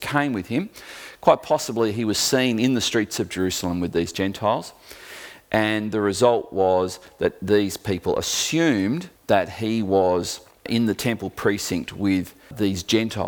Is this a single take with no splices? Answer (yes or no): no